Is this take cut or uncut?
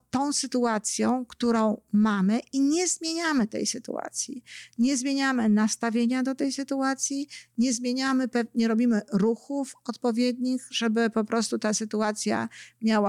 uncut